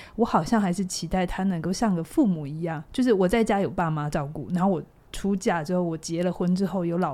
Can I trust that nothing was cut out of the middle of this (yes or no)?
no